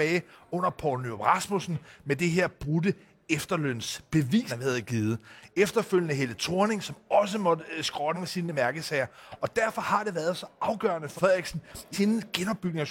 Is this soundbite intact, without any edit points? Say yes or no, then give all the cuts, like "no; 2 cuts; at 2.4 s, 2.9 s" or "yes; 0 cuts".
no; 4 cuts; at 4.5 s, 8.1 s, 11.2 s, 11.9 s